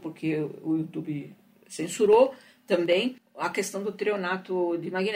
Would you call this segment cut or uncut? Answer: uncut